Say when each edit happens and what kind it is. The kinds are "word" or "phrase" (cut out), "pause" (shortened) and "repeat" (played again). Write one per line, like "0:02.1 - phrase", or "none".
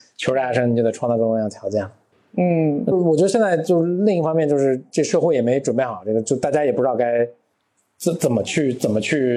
0:02.9 - phrase